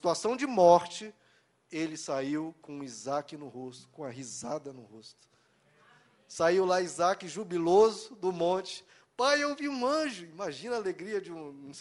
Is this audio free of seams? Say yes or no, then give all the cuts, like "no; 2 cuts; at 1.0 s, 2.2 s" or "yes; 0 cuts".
yes; 0 cuts